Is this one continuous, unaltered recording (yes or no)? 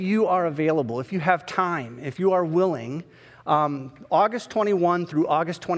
yes